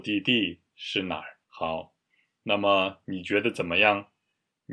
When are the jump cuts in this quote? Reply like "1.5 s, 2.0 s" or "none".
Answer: 1.4 s